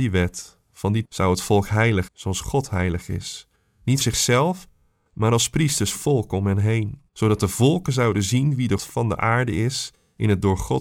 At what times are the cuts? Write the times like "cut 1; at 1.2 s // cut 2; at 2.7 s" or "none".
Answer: cut 1; at 1.0 s // cut 2; at 2.1 s // cut 3; at 4.0 s // cut 4; at 5.9 s // cut 5; at 7.1 s // cut 6; at 8.8 s

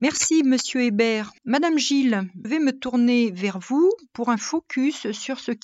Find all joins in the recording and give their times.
cut 1; at 1.4 s // cut 2; at 2.4 s

